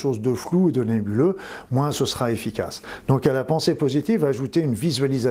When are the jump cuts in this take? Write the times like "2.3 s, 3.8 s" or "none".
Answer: none